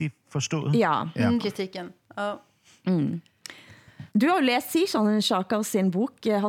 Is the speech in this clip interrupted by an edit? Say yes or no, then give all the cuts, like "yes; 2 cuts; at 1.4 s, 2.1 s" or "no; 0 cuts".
yes; 2 cuts; at 1.4 s, 4.1 s